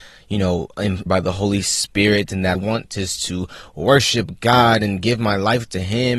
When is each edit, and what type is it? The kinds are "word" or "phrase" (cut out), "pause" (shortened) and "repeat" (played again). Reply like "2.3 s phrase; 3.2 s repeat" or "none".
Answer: 1.1 s word; 2.5 s phrase